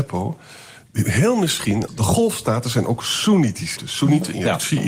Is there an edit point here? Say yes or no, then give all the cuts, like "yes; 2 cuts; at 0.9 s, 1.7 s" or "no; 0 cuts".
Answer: yes; 2 cuts; at 1.9 s, 3.8 s